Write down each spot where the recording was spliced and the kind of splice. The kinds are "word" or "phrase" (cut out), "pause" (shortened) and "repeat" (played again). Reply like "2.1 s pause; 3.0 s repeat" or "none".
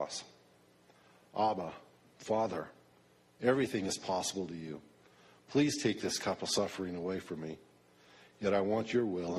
none